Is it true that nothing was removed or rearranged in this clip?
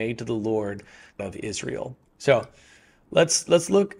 no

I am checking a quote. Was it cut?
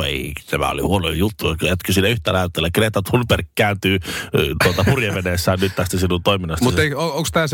no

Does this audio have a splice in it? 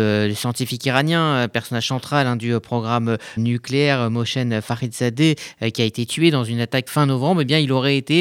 yes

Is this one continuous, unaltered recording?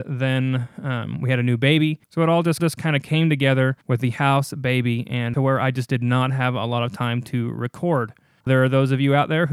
no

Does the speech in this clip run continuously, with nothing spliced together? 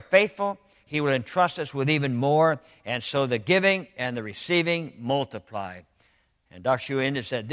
yes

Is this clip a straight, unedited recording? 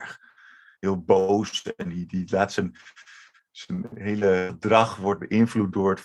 yes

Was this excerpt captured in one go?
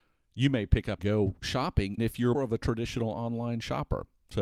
no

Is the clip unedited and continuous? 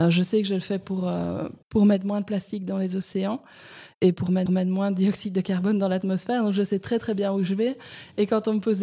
no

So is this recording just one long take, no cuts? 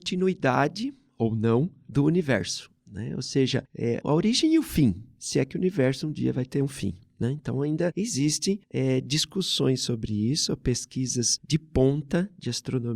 yes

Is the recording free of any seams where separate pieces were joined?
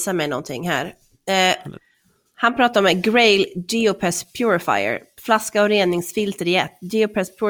yes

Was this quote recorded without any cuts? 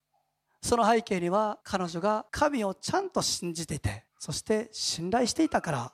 no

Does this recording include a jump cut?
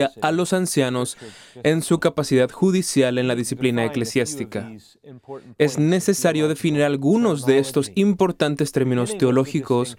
no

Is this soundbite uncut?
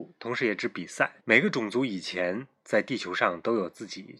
no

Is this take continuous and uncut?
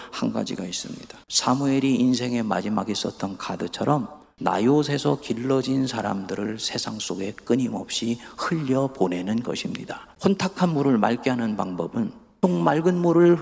no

